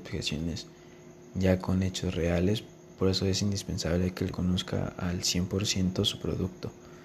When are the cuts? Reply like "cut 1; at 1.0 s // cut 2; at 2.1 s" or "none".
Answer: cut 1; at 4.3 s